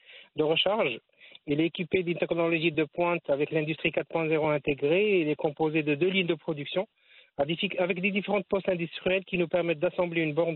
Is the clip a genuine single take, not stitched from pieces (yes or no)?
yes